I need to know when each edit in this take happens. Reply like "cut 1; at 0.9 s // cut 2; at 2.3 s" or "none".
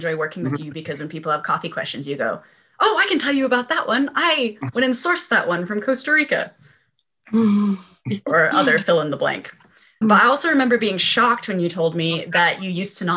cut 1; at 10.0 s